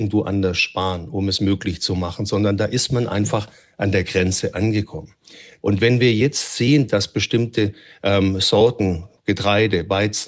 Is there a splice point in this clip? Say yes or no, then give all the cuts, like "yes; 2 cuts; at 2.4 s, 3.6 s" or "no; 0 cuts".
no; 0 cuts